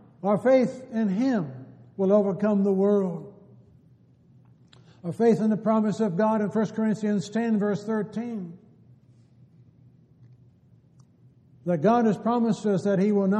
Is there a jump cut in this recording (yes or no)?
no